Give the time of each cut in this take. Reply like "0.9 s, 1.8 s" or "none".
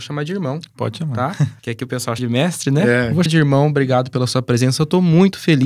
1.6 s, 2.2 s, 3.3 s